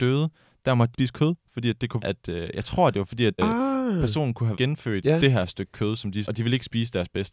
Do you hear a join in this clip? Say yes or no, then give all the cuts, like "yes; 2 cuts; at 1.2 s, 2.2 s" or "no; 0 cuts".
yes; 6 cuts; at 0.9 s, 2.0 s, 3.4 s, 4.6 s, 5.0 s, 6.3 s